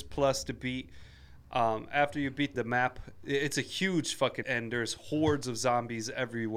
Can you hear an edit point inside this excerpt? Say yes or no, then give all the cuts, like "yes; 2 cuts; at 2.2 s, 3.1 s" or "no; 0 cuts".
yes; 2 cuts; at 2.5 s, 4.4 s